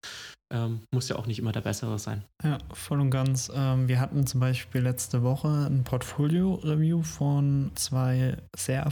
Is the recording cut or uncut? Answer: cut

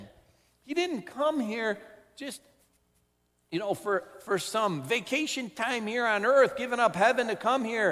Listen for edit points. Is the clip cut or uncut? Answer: uncut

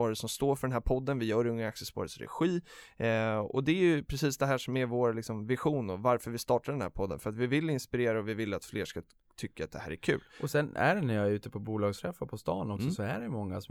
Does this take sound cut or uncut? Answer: uncut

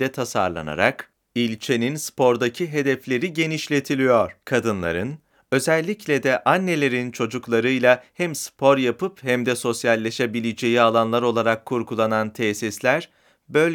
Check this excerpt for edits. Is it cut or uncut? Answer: cut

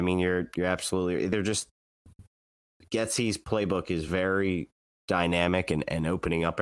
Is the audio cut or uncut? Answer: uncut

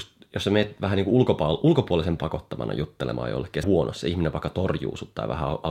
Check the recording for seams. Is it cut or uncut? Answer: cut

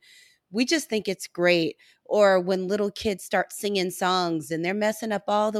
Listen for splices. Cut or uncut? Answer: uncut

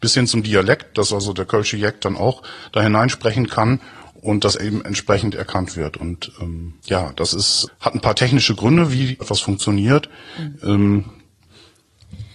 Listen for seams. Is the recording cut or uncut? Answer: cut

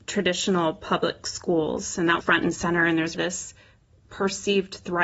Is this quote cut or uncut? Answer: cut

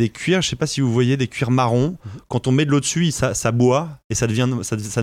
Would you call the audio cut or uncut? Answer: uncut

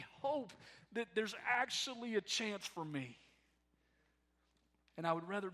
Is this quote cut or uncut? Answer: uncut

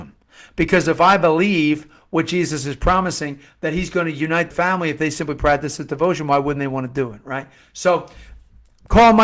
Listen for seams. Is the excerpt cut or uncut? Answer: cut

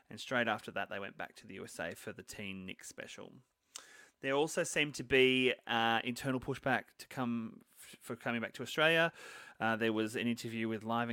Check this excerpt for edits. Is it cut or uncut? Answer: uncut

